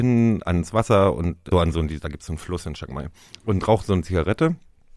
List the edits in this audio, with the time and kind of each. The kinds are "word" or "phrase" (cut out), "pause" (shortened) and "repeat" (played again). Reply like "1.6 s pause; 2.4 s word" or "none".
1.5 s word